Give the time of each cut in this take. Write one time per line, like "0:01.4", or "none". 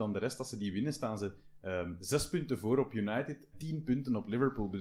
0:03.5